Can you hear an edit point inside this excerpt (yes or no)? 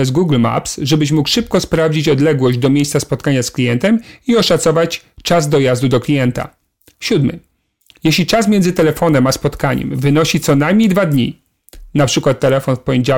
no